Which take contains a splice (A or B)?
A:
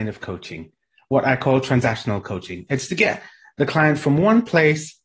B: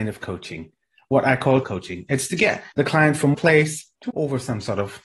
B